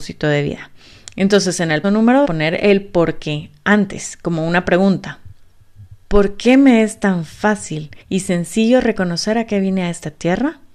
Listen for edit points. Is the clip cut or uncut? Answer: cut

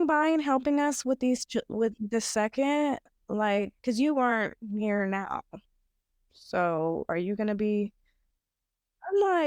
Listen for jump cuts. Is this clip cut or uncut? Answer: uncut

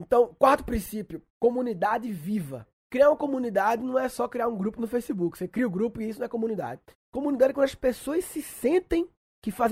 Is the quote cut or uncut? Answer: uncut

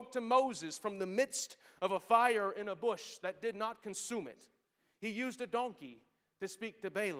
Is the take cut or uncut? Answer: uncut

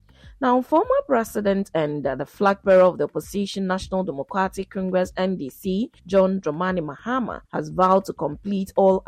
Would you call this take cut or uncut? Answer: cut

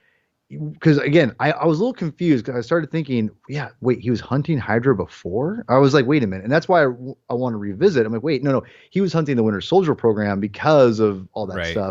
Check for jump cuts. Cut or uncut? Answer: uncut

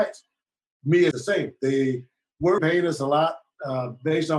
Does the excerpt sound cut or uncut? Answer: cut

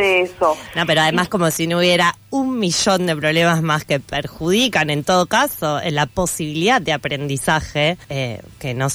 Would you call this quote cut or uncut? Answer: cut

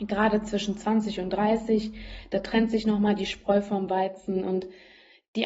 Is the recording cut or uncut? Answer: uncut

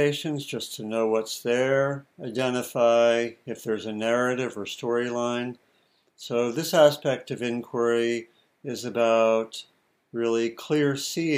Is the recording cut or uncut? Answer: uncut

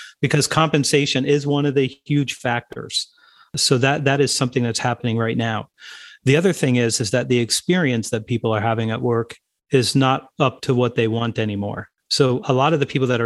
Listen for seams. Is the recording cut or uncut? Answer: uncut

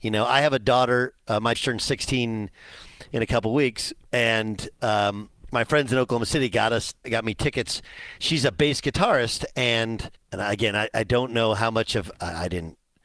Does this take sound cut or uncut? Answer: cut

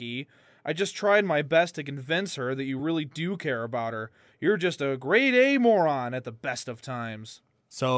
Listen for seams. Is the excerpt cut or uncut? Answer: uncut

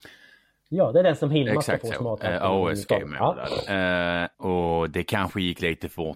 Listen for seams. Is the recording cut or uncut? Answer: cut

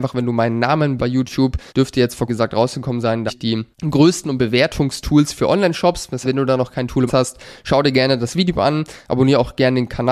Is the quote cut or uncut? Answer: cut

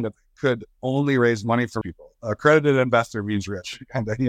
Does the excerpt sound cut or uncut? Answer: cut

